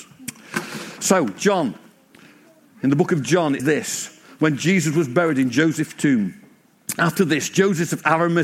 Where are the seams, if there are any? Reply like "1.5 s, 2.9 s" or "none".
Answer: 3.6 s